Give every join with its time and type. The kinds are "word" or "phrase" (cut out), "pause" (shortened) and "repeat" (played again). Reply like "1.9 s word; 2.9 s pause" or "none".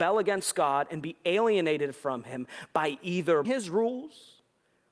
3.4 s word